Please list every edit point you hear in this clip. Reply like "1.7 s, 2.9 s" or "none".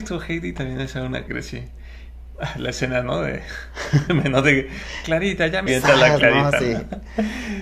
1.3 s, 4.1 s, 5.7 s